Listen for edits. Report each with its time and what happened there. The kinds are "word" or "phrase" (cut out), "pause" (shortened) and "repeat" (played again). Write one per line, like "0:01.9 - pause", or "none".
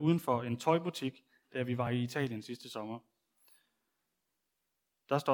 none